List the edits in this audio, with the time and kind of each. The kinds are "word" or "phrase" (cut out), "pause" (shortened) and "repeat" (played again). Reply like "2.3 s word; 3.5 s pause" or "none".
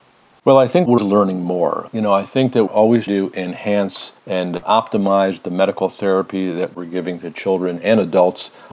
1.0 s word; 2.7 s word; 3.1 s word; 4.2 s pause

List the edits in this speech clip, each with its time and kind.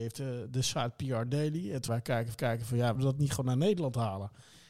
1.9 s word; 2.3 s repeat; 3.0 s phrase

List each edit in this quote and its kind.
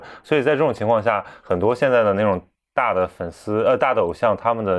none

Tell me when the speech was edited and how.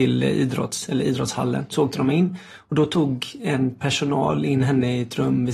none

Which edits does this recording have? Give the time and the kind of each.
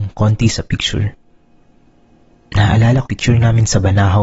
3.1 s word

